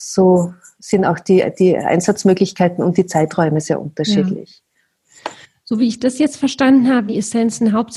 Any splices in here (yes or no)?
yes